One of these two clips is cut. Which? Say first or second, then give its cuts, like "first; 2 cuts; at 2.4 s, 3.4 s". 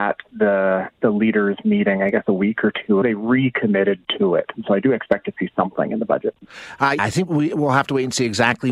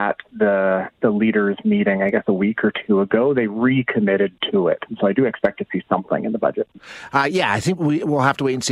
first; 2 cuts; at 3.0 s, 7.0 s